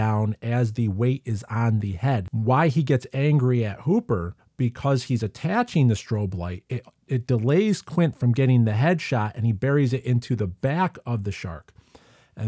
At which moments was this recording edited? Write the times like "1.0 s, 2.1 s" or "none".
4.4 s